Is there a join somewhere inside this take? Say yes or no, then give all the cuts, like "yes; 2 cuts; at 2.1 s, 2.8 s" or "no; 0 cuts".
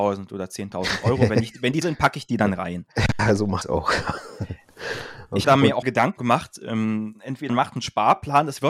yes; 6 cuts; at 1.8 s, 3.6 s, 5.4 s, 5.8 s, 6.2 s, 7.5 s